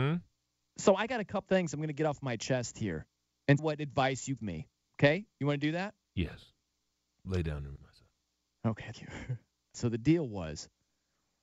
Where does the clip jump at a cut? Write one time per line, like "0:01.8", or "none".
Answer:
0:01.5
0:03.6
0:04.4
0:07.8
0:08.9
0:09.7

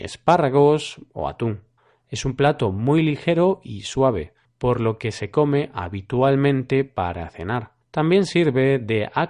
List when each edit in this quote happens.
0:01.8
0:04.4
0:07.8

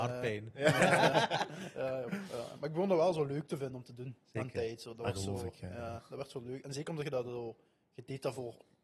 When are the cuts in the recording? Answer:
none

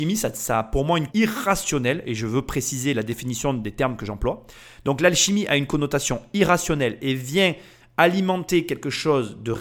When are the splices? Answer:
0:01.1

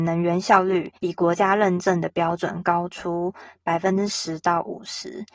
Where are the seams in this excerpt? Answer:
0:00.9

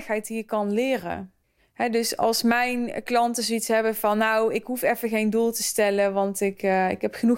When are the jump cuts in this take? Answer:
0:01.4

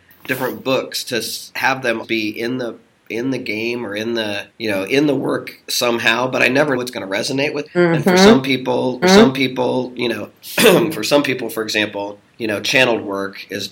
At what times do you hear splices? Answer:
0:02.0
0:04.5
0:06.8
0:07.7
0:09.0
0:12.3

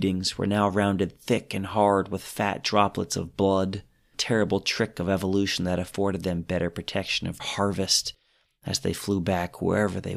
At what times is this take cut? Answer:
0:04.1
0:07.4

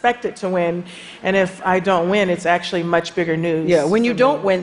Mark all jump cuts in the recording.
none

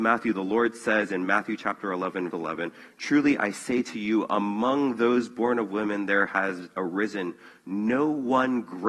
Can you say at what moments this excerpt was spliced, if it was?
0:02.3

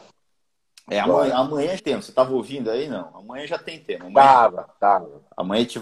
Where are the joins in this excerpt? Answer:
0:01.8

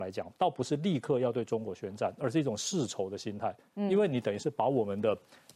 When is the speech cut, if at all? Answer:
none

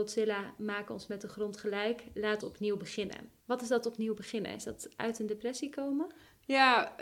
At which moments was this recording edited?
0:02.4
0:03.4

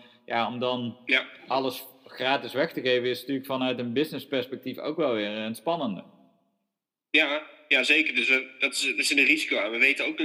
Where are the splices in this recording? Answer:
none

